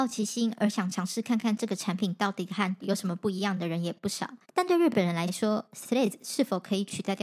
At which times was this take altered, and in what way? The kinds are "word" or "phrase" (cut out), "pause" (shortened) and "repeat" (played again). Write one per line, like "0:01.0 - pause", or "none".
0:02.8 - word
0:04.4 - pause